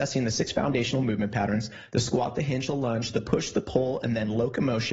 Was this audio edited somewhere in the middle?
no; 0 cuts

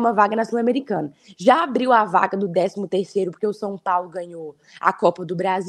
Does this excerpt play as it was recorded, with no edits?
yes; 0 cuts

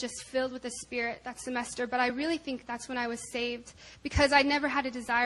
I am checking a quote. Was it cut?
no; 0 cuts

